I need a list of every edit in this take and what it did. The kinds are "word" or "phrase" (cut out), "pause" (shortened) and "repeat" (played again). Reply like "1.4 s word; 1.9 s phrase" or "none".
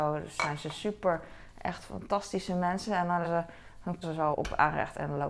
3.2 s word; 4.0 s word; 4.3 s word